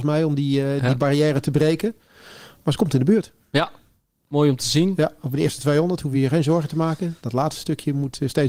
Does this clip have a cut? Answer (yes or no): no